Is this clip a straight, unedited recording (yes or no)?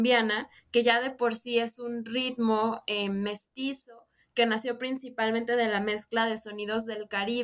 yes